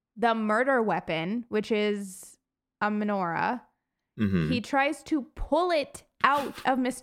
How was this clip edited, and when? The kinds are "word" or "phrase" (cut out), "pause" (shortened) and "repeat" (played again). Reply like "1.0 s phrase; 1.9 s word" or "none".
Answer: 2.5 s pause